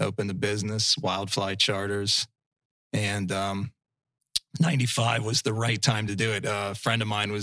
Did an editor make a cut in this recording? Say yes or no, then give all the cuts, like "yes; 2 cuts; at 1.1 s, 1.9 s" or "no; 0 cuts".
no; 0 cuts